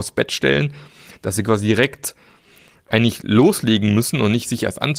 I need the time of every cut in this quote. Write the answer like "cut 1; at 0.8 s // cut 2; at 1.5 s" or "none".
none